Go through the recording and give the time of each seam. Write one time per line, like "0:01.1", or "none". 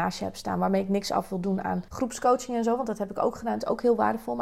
0:01.9